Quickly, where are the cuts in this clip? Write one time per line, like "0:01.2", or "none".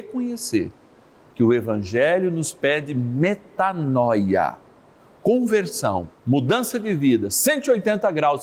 0:06.1